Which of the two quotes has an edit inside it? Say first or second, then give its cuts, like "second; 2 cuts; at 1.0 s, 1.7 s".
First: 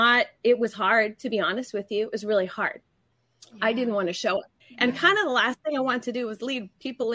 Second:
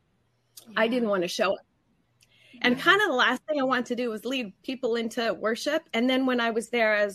first; 1 cut; at 4.6 s